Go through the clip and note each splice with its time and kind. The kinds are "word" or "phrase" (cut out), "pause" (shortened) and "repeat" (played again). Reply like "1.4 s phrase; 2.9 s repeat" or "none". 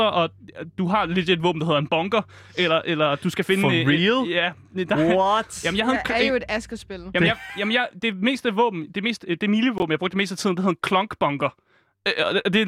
none